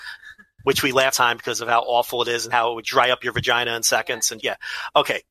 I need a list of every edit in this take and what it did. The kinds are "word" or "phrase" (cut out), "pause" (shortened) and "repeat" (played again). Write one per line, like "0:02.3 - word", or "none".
0:01.1 - phrase
0:02.8 - word
0:04.4 - word